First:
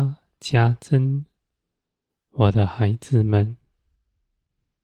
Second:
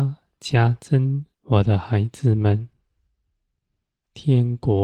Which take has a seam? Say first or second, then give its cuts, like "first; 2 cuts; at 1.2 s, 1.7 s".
second; 1 cut; at 1.3 s